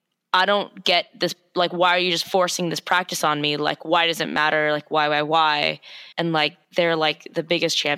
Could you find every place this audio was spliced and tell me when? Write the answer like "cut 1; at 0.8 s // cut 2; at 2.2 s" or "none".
cut 1; at 6.1 s // cut 2; at 6.6 s